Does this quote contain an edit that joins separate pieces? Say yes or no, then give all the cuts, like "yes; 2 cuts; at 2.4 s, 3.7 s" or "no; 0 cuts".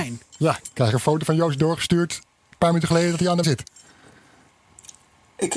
yes; 1 cut; at 3.4 s